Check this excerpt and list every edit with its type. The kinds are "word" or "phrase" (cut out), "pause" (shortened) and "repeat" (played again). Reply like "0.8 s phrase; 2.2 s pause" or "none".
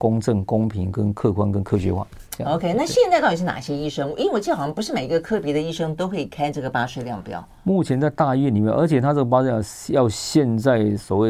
7.6 s pause